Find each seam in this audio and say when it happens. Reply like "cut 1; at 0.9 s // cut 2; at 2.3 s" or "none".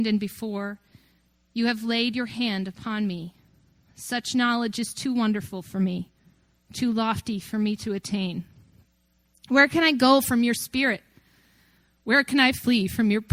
none

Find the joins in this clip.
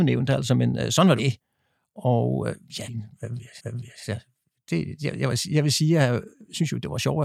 cut 1; at 1.2 s // cut 2; at 2.9 s // cut 3; at 3.6 s

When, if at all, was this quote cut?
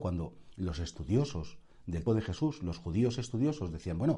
cut 1; at 2.1 s

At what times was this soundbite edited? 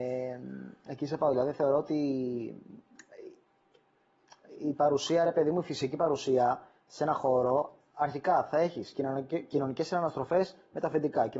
none

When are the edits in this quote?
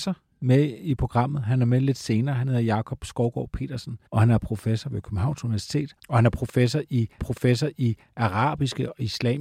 cut 1; at 4.1 s // cut 2; at 6.0 s // cut 3; at 7.2 s

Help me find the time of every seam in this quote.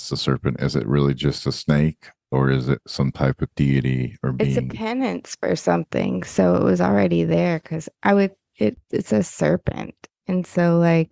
none

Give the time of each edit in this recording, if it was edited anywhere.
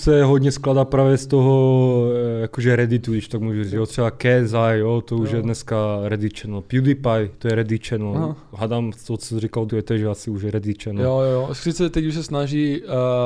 cut 1; at 9.7 s

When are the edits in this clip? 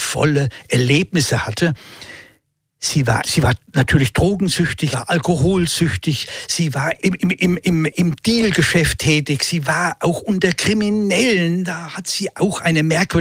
cut 1; at 3.2 s // cut 2; at 4.9 s // cut 3; at 7.0 s

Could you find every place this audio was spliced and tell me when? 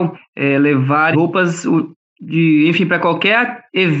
cut 1; at 1.1 s

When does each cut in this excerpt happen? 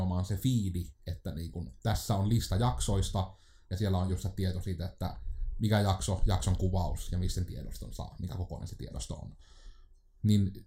none

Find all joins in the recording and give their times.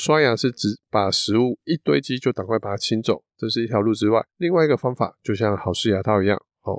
cut 1; at 4.3 s

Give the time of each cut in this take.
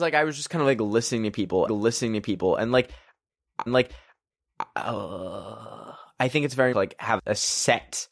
cut 1; at 1.7 s // cut 2; at 3.7 s // cut 3; at 6.7 s // cut 4; at 7.2 s

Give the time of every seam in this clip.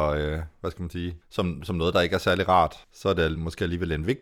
cut 1; at 1.2 s // cut 2; at 2.8 s

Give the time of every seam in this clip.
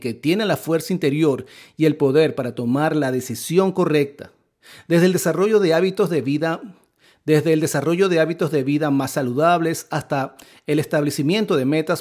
none

